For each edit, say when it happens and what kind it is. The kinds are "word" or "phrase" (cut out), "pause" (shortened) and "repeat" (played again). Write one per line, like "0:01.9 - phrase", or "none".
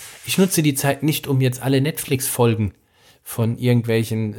none